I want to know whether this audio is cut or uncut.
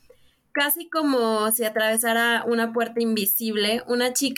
uncut